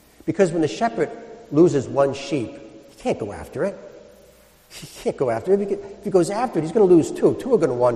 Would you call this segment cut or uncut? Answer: uncut